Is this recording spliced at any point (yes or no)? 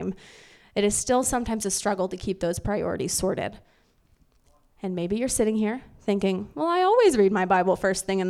no